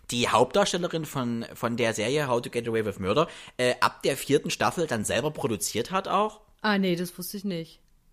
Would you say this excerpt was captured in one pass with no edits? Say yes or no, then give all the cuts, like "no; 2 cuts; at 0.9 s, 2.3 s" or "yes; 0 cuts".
yes; 0 cuts